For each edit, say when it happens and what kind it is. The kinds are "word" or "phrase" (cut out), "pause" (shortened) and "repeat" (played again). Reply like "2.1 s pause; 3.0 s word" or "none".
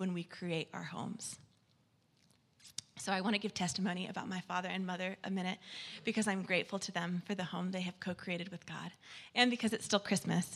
none